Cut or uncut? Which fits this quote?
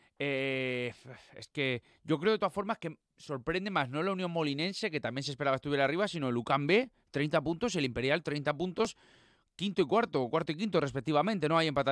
uncut